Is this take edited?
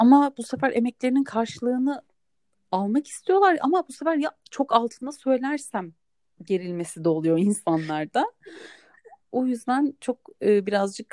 no; 0 cuts

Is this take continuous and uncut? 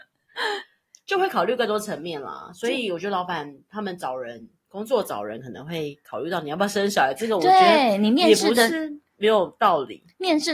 yes; 0 cuts

